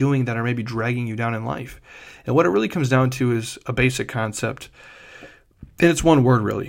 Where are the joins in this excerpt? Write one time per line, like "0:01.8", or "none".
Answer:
none